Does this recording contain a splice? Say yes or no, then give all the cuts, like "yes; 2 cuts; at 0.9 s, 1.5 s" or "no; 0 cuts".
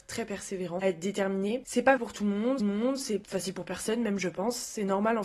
yes; 2 cuts; at 2.0 s, 2.6 s